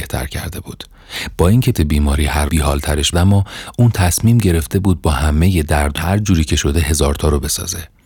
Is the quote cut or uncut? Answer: cut